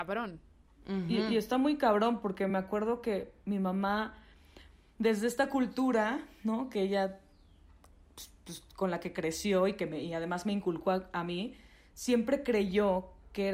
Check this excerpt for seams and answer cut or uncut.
uncut